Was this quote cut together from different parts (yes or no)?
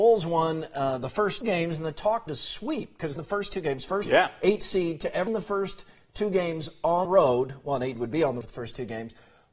yes